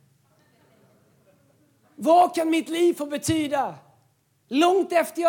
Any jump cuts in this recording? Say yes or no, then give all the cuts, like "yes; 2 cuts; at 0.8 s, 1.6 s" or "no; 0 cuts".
no; 0 cuts